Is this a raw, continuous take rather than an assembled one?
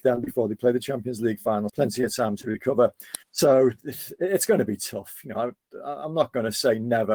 no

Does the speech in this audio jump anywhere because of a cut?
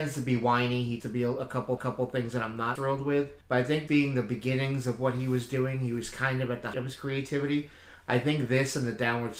yes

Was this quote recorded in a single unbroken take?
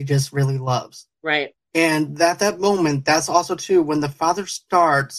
no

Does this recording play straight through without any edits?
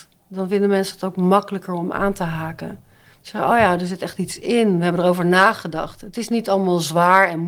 yes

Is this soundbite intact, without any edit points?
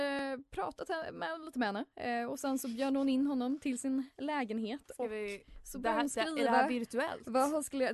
yes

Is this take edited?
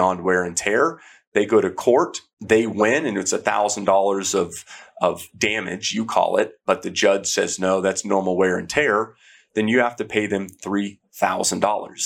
no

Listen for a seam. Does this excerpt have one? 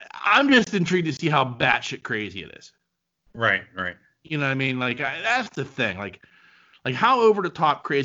no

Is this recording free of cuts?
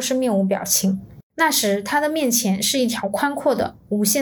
no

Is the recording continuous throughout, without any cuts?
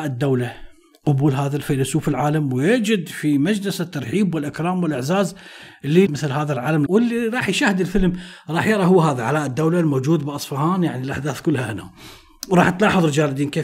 no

